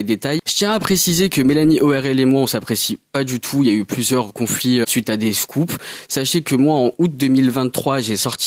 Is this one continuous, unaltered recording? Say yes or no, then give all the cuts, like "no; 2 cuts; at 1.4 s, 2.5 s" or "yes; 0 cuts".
no; 2 cuts; at 4.3 s, 4.8 s